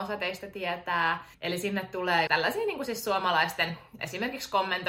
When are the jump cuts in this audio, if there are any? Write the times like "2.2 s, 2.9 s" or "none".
1.3 s, 2.3 s, 4.0 s